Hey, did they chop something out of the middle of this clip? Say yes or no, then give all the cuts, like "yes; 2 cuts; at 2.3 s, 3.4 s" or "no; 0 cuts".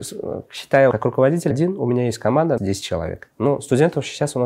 yes; 3 cuts; at 0.9 s, 1.5 s, 2.6 s